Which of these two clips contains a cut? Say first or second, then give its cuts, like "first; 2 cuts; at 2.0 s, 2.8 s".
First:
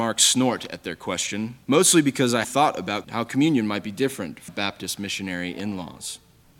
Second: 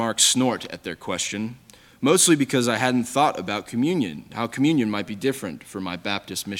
first; 4 cuts; at 1.6 s, 2.4 s, 3.0 s, 4.5 s